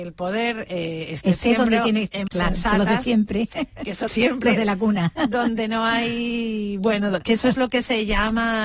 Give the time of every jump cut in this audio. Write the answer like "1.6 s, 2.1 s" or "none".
2.3 s, 4.1 s